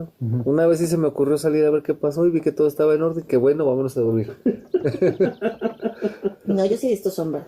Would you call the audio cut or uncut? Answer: uncut